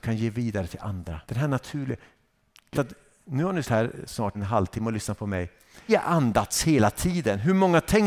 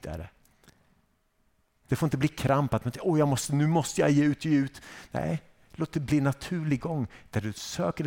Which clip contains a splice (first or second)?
first